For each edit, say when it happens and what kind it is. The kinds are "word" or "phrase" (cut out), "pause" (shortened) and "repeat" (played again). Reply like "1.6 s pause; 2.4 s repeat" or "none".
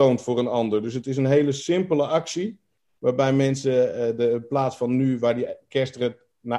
none